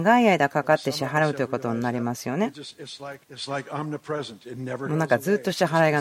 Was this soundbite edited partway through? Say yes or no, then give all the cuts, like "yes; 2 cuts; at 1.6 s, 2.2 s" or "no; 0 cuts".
yes; 1 cut; at 3.2 s